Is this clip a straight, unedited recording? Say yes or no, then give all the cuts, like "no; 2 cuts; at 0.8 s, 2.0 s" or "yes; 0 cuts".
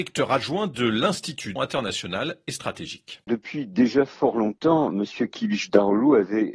no; 1 cut; at 1.6 s